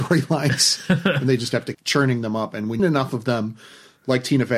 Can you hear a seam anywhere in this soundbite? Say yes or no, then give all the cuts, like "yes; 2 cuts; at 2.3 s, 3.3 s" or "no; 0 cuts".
yes; 2 cuts; at 1.7 s, 2.8 s